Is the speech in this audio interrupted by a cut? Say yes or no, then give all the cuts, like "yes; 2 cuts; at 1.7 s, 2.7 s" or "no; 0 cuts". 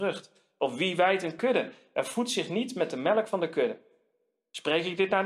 no; 0 cuts